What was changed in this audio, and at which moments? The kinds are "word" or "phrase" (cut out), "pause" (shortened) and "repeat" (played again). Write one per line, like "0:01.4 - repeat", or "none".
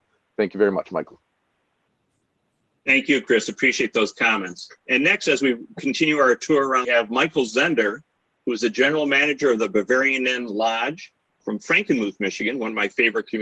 0:04.8 - pause
0:06.8 - phrase
0:11.4 - word

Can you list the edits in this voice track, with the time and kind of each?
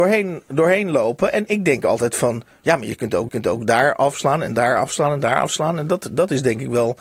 0:03.3 - repeat

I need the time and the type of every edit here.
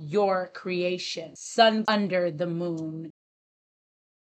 0:01.8 - word

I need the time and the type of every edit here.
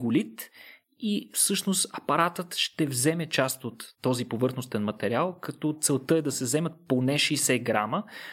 none

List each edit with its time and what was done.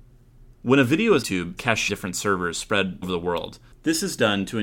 0:01.2 - word
0:01.6 - word
0:01.9 - word
0:03.0 - word

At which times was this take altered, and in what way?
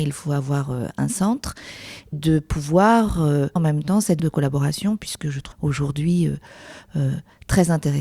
0:02.1 - word
0:03.6 - word
0:04.2 - word
0:05.5 - word

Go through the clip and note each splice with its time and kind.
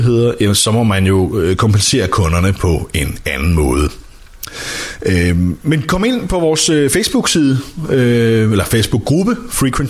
none

